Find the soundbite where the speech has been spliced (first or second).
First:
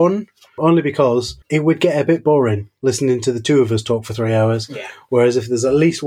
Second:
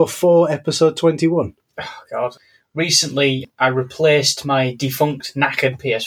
first